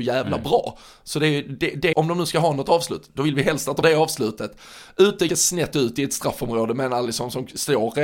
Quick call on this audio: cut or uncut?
cut